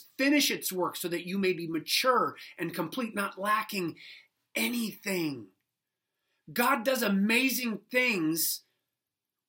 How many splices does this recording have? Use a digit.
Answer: 0